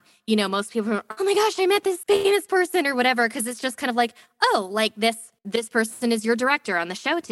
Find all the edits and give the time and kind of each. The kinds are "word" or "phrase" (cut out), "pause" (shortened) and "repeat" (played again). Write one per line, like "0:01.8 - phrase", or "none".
0:01.2 - phrase
0:02.0 - word
0:05.4 - pause

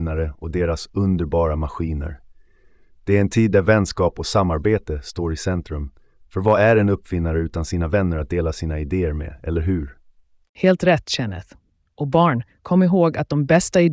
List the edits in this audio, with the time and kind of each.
none

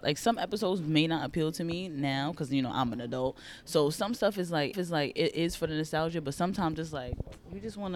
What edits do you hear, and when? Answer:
0:04.7 - repeat

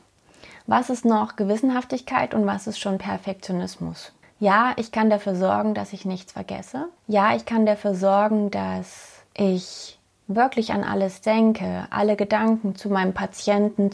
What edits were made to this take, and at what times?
0:04.2 - pause
0:07.0 - pause
0:09.3 - pause

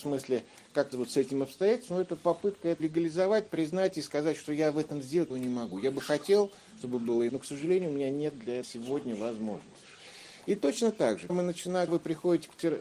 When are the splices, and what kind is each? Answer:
0:00.9 - word
0:02.8 - word
0:05.3 - word
0:07.3 - word
0:08.6 - word
0:11.3 - word
0:11.9 - word

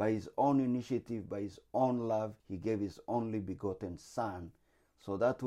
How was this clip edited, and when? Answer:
0:02.4 - pause

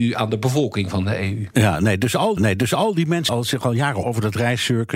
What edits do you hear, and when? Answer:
0:02.4 - repeat
0:03.3 - word
0:04.0 - word

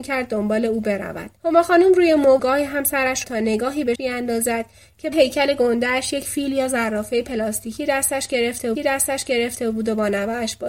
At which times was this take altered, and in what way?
0:01.4 - pause
0:02.4 - phrase
0:03.2 - phrase
0:03.9 - word
0:05.1 - word
0:08.7 - repeat

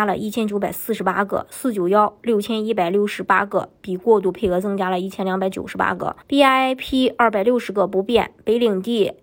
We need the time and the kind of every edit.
0:06.2 - pause

